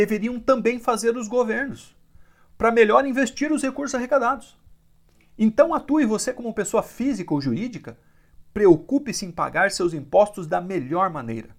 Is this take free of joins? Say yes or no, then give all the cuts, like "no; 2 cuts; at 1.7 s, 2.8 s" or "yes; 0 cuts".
yes; 0 cuts